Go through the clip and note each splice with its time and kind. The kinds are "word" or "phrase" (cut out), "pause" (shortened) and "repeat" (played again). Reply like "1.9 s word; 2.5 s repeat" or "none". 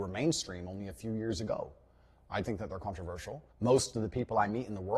2.4 s word; 3.5 s pause